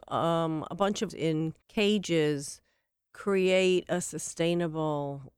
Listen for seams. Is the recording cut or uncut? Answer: cut